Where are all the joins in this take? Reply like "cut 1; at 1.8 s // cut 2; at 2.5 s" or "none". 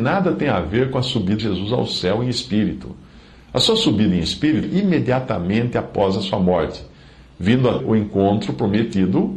cut 1; at 1.4 s // cut 2; at 4.6 s // cut 3; at 7.8 s